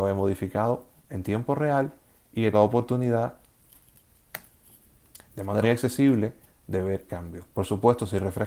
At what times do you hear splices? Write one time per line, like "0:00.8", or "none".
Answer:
0:02.5
0:05.6
0:07.1
0:07.5